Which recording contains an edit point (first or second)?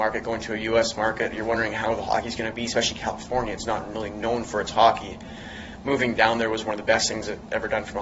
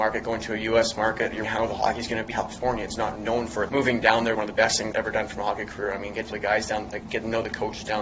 second